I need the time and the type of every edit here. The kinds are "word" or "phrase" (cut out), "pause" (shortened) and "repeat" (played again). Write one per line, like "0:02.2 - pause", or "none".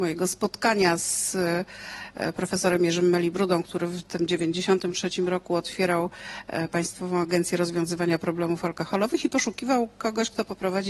none